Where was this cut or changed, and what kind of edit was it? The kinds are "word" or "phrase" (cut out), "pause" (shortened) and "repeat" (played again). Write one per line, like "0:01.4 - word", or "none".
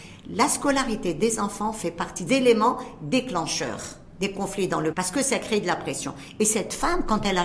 0:02.3 - word
0:04.9 - word